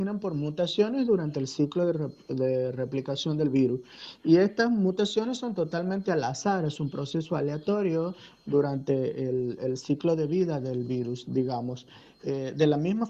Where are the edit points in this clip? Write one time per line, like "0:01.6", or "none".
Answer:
none